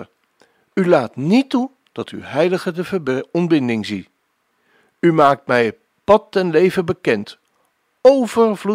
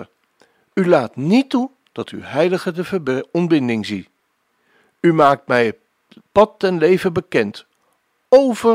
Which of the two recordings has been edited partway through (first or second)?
first